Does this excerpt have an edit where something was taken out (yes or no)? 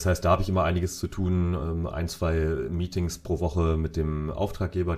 no